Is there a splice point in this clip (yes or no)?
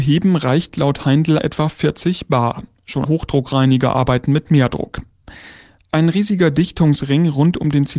yes